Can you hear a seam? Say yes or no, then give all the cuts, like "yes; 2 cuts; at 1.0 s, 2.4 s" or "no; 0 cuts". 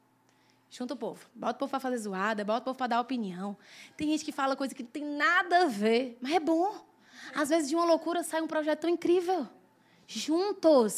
no; 0 cuts